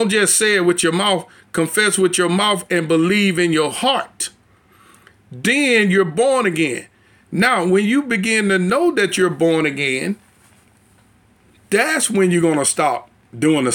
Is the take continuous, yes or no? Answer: yes